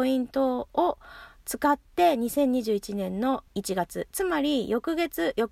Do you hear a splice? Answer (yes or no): yes